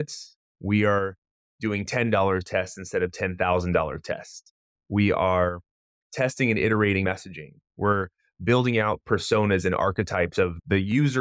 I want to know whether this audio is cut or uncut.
cut